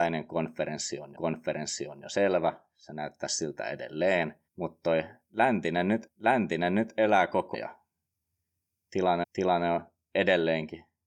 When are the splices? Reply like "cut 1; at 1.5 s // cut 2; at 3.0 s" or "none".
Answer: cut 1; at 1.1 s // cut 2; at 4.5 s // cut 3; at 6.1 s // cut 4; at 7.5 s // cut 5; at 9.2 s